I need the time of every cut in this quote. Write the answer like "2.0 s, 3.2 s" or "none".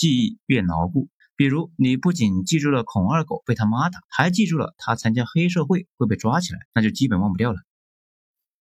1.2 s, 4.0 s, 6.7 s